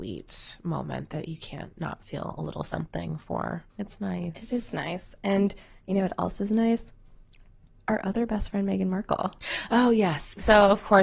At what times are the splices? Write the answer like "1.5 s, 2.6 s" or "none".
3.7 s